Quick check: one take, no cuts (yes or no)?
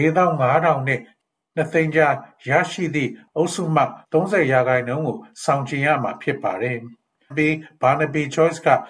no